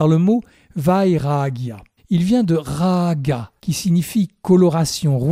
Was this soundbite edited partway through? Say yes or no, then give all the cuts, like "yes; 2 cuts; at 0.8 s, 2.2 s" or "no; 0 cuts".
yes; 2 cuts; at 2.0 s, 3.6 s